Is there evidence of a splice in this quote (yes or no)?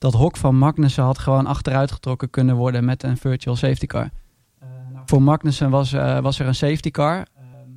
no